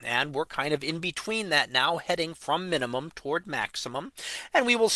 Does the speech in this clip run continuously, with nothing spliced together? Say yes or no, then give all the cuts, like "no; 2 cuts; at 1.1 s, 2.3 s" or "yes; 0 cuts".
yes; 0 cuts